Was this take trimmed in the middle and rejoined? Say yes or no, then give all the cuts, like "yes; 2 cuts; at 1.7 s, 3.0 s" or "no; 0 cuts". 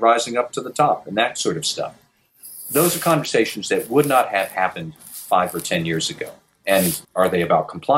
yes; 1 cut; at 7.0 s